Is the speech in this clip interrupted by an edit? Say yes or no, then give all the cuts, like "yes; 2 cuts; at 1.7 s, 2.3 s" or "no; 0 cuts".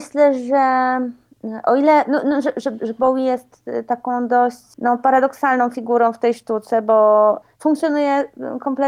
no; 0 cuts